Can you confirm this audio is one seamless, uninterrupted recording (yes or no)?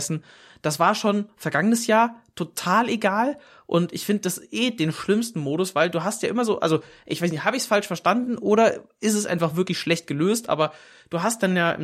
yes